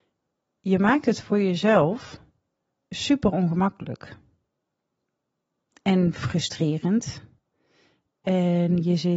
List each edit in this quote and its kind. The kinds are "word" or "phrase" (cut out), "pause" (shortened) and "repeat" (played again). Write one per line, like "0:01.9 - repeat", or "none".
none